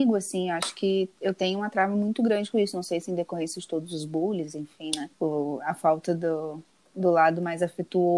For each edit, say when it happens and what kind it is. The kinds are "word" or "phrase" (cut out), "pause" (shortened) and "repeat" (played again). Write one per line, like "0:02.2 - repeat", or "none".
0:05.1 - pause
0:06.7 - pause